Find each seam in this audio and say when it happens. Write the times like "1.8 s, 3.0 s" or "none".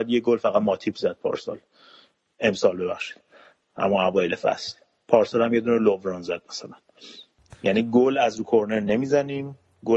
none